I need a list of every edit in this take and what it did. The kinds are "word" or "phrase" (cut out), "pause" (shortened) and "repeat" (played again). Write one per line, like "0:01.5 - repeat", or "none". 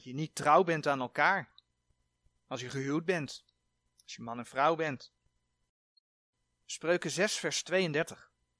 none